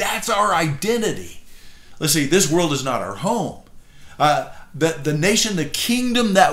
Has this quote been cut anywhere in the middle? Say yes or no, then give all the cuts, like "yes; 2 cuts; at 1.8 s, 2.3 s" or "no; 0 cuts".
no; 0 cuts